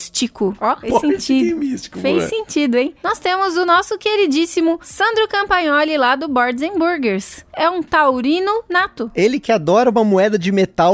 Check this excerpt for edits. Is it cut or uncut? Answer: uncut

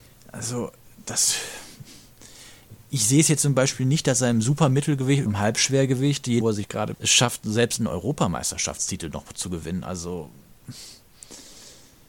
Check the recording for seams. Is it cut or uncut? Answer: cut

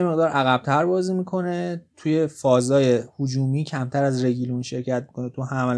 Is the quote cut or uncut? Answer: uncut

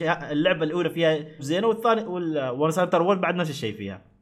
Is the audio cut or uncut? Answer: cut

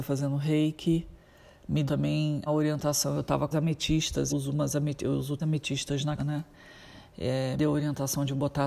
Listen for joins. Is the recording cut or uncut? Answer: cut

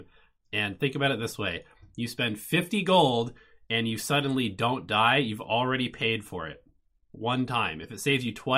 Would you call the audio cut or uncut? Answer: uncut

